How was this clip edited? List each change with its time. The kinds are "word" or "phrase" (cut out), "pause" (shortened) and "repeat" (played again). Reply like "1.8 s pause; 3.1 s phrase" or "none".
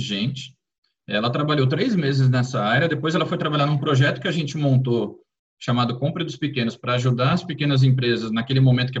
none